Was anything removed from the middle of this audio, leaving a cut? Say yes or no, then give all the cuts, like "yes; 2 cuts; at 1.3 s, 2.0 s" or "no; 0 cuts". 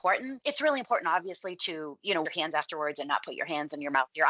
yes; 1 cut; at 2.3 s